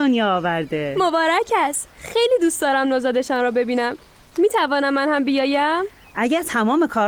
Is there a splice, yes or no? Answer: no